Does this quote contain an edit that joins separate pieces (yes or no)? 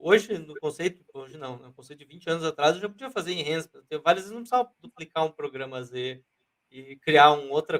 no